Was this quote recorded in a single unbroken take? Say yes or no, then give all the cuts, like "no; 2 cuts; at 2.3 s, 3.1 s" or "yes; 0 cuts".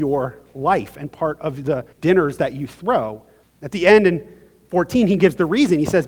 no; 2 cuts; at 1.9 s, 3.4 s